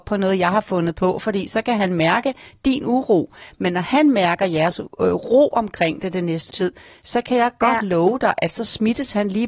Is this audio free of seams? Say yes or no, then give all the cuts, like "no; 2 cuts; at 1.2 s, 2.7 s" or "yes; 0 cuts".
no; 1 cut; at 6.5 s